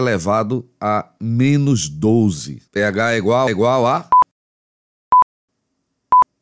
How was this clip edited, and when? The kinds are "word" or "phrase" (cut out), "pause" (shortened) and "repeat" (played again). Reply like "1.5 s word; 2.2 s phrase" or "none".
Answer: 2.7 s pause; 3.5 s repeat